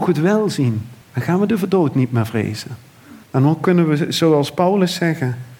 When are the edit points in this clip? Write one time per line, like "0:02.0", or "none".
0:01.0
0:03.2